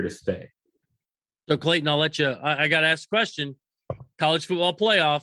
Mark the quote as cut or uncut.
uncut